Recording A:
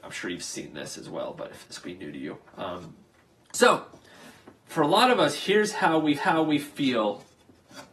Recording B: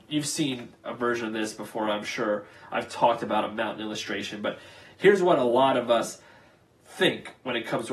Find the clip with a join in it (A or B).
A